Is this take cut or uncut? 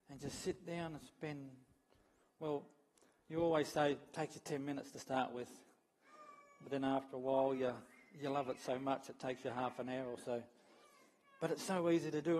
uncut